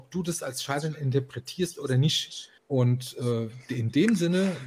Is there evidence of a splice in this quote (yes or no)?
yes